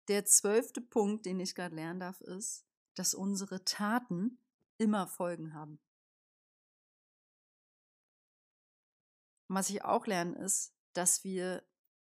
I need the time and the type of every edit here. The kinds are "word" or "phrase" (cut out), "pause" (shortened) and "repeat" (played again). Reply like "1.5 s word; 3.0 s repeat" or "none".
10.8 s pause